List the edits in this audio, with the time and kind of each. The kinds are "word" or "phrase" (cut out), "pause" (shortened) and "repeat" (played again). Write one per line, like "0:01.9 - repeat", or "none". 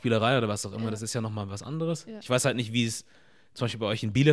none